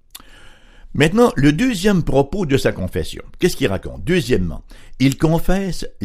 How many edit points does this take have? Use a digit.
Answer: 0